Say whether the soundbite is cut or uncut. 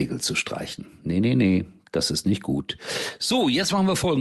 uncut